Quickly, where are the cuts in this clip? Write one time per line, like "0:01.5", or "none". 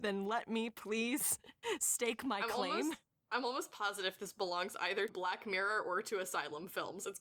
0:05.1